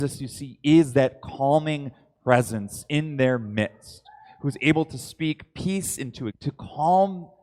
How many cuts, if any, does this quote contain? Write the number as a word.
one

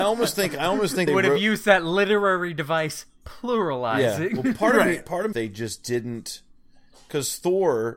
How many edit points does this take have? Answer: two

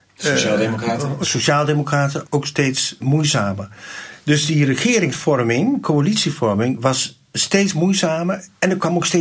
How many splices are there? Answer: three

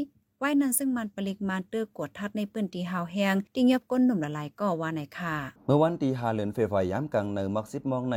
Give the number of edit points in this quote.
two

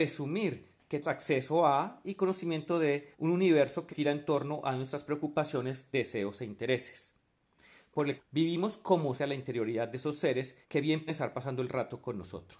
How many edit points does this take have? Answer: seven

